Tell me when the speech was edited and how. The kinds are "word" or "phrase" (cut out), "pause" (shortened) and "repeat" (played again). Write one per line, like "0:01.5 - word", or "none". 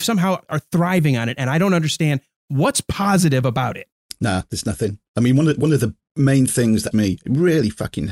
0:06.9 - word